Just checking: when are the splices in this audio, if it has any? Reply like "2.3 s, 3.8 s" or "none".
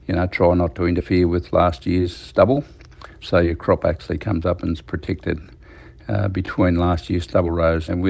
none